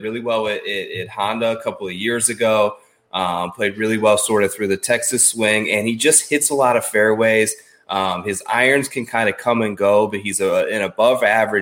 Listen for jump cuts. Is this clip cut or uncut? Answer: uncut